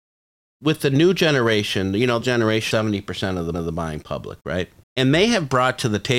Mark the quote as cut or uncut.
cut